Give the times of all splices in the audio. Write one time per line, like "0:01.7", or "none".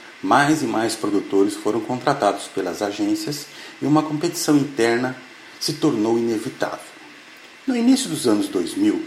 0:07.6

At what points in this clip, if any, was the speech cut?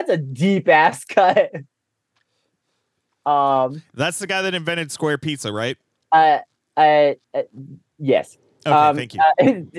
0:07.2

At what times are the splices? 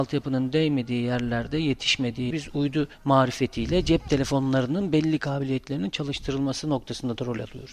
0:02.3
0:02.9

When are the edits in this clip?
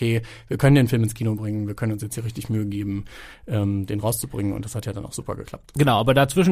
none

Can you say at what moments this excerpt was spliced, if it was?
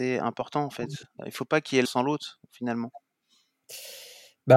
0:01.2
0:01.8

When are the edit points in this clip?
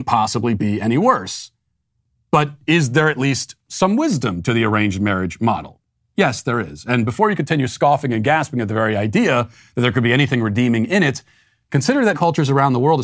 0:12.1

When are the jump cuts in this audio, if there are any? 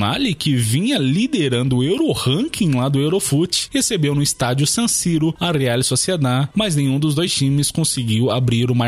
none

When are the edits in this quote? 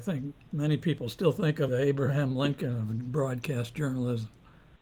0:01.7

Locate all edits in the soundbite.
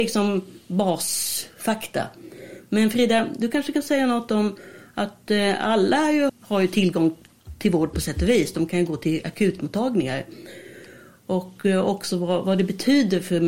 0:06.3

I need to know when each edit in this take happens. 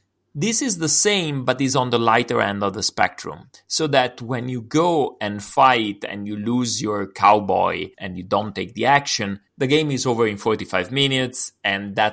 0:07.9
0:09.5

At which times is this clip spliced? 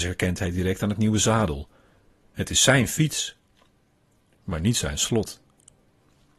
none

